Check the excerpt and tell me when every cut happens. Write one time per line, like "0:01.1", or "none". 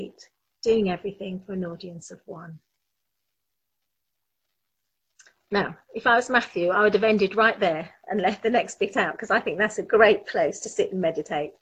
none